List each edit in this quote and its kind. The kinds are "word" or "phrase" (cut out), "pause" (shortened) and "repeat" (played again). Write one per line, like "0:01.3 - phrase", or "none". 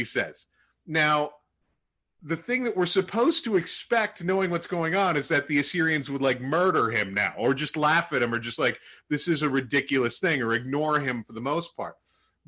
none